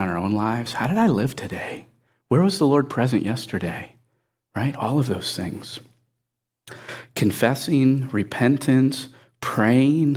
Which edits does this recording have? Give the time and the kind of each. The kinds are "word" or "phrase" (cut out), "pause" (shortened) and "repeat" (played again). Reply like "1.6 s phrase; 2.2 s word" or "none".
none